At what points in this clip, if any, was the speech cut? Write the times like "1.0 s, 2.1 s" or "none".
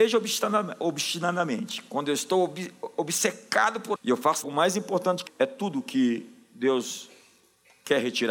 4.0 s, 4.4 s, 5.3 s